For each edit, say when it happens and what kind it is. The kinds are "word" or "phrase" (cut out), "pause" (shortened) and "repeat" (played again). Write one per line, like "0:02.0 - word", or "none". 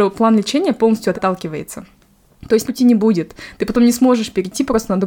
0:01.1 - word
0:02.6 - word

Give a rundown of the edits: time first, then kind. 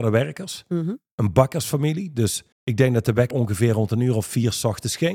0:02.5 - pause
0:03.3 - word

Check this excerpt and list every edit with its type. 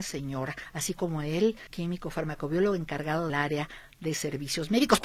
0:01.7 - word
0:03.3 - word

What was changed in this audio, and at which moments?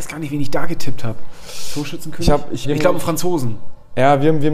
0:02.6 - word

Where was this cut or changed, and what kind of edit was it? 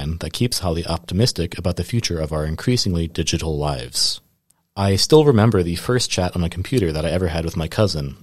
0:04.5 - pause

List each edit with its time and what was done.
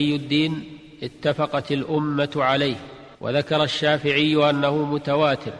0:03.1 - pause

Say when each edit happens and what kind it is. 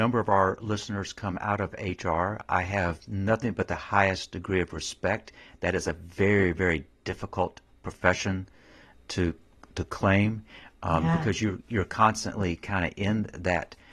none

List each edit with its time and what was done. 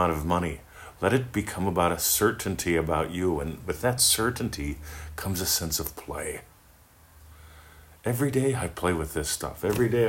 none

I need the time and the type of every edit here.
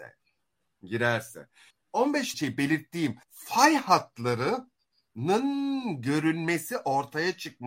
0:01.7 - word
0:02.3 - phrase
0:03.2 - pause

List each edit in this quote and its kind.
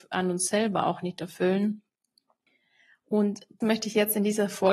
0:03.6 - word

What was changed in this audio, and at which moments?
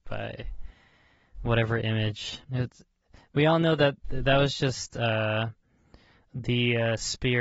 0:02.4 - pause

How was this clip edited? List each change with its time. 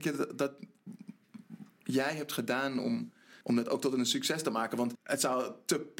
0:03.4 - pause
0:04.9 - word

